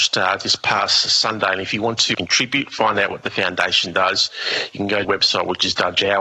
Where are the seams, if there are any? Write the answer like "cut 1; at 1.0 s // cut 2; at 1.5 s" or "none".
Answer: cut 1; at 2.1 s // cut 2; at 5.0 s